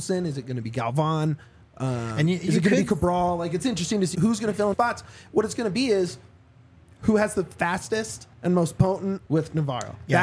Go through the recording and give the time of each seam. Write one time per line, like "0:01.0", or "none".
0:04.1
0:04.7
0:08.3
0:09.3

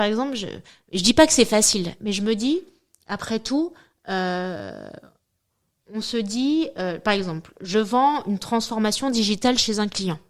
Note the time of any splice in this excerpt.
none

